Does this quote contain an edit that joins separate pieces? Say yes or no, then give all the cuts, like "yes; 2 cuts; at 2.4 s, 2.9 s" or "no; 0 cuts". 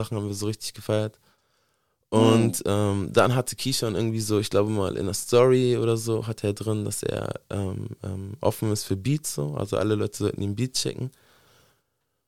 no; 0 cuts